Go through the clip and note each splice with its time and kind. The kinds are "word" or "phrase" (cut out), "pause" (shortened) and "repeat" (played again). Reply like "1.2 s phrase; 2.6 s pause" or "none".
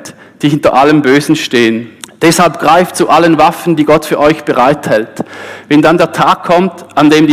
2.0 s pause